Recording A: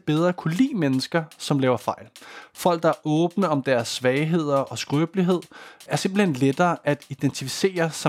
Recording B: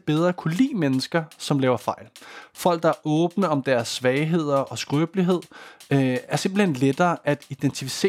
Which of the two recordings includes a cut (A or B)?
A